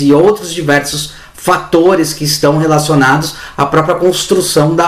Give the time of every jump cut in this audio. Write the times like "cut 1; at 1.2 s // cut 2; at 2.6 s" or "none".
none